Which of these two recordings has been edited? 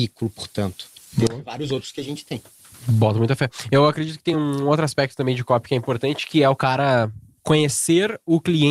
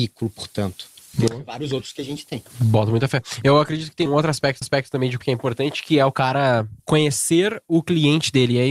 second; 5 cuts; at 2.5 s, 4.1 s, 4.6 s, 5.2 s, 6.8 s

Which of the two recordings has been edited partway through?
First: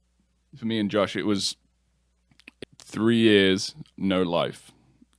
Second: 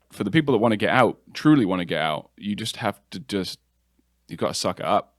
first; 2 cuts; at 2.6 s, 3.9 s

